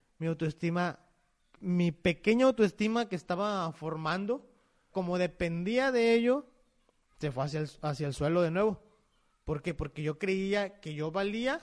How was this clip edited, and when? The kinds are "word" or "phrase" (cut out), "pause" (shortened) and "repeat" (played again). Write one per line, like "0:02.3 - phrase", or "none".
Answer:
0:01.6 - word
0:04.9 - word